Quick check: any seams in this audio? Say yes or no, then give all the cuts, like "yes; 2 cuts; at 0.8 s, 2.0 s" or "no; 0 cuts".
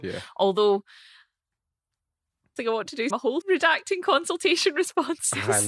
yes; 3 cuts; at 2.6 s, 3.1 s, 3.4 s